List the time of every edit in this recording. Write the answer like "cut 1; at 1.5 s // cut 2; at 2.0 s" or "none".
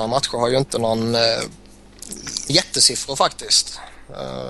cut 1; at 2.5 s